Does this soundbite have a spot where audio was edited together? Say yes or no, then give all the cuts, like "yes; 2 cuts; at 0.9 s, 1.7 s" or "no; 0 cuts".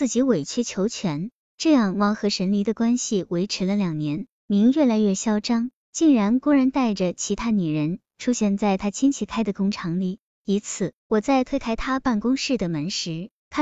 yes; 1 cut; at 11.0 s